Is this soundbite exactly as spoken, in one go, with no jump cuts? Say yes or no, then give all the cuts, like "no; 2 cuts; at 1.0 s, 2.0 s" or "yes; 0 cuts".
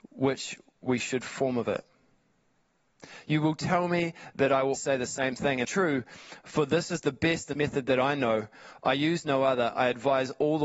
no; 3 cuts; at 4.7 s, 5.6 s, 7.5 s